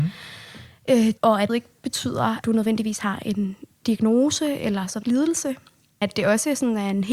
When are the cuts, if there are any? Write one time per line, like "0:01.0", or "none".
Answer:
0:01.2
0:01.5
0:02.4
0:05.0
0:06.0